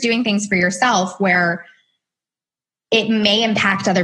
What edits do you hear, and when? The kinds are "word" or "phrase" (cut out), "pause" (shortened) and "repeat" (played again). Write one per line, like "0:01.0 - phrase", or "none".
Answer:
none